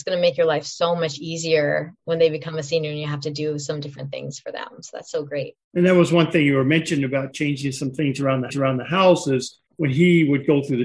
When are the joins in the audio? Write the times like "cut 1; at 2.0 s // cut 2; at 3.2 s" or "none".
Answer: cut 1; at 5.6 s // cut 2; at 8.5 s // cut 3; at 9.7 s